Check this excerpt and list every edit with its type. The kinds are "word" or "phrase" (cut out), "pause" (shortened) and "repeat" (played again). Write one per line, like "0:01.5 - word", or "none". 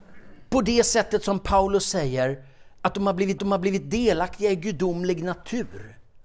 0:03.4 - repeat